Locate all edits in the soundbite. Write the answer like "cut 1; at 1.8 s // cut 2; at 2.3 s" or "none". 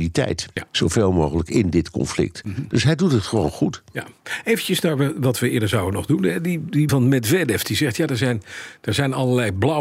cut 1; at 6.9 s